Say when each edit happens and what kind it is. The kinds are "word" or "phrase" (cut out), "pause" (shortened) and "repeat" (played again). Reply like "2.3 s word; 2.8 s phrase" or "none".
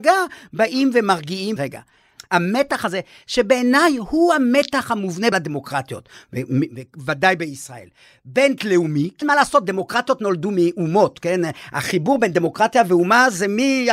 1.6 s word; 5.3 s word; 8.6 s word; 9.2 s word